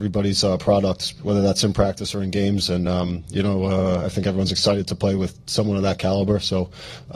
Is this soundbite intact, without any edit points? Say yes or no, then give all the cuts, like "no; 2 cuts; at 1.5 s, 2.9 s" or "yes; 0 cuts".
yes; 0 cuts